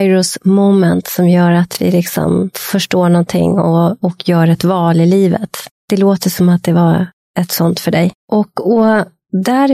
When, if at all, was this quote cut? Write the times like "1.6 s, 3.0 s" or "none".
8.2 s